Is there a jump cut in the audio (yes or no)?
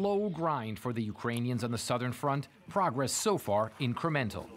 no